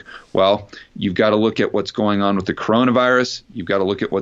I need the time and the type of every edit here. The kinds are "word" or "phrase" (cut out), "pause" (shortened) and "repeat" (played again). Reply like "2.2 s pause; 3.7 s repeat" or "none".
none